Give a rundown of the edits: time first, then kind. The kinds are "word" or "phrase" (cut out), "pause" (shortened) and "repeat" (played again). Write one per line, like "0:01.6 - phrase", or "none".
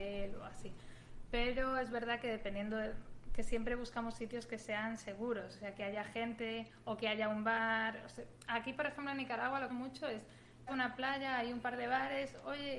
0:09.7 - phrase
0:10.7 - word